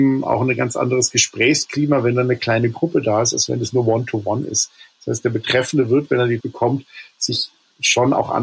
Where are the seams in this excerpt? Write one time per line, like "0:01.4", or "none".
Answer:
0:06.4